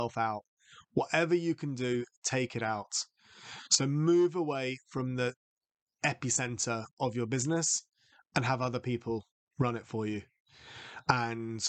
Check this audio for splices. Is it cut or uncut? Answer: uncut